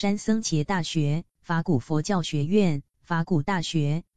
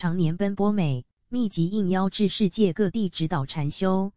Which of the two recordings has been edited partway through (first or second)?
second